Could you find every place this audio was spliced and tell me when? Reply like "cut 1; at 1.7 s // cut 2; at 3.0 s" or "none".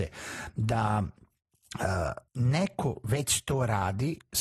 cut 1; at 2.3 s